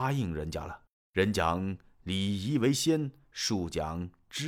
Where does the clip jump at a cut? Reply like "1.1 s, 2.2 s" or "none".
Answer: 0.9 s